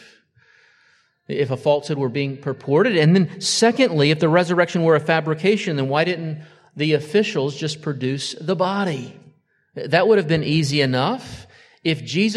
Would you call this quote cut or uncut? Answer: uncut